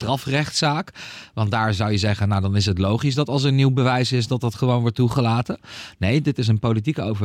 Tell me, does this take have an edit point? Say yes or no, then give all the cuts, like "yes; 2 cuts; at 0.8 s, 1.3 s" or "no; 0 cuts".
no; 0 cuts